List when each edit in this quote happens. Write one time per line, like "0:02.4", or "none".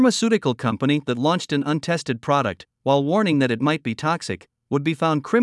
none

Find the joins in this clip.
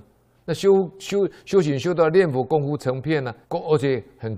0:03.4

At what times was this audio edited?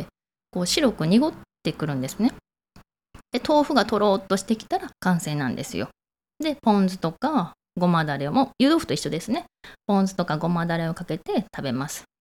0:04.9

